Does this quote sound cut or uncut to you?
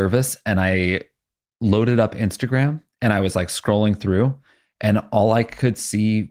uncut